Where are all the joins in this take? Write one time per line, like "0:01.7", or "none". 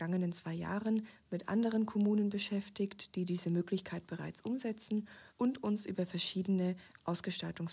0:05.3